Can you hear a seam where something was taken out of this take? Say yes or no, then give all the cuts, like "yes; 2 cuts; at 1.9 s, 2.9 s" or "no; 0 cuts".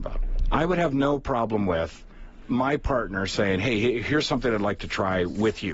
yes; 1 cut; at 2.4 s